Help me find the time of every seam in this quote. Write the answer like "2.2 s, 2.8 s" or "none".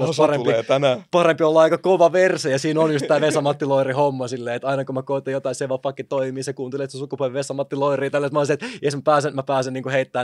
none